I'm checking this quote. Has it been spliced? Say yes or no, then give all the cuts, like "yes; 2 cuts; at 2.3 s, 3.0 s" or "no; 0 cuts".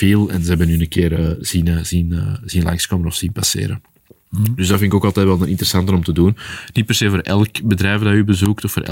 no; 0 cuts